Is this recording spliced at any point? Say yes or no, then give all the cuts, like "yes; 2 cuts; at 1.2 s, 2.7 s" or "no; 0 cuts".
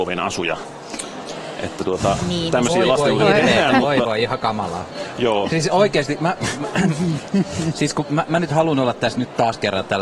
no; 0 cuts